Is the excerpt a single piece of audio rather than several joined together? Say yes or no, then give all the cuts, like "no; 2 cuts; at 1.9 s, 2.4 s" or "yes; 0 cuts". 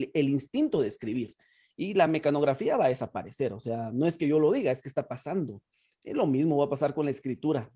yes; 0 cuts